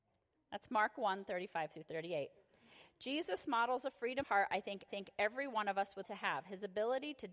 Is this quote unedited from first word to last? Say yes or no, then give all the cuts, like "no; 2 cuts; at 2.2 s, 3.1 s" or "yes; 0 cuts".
no; 3 cuts; at 4.2 s, 4.9 s, 6.0 s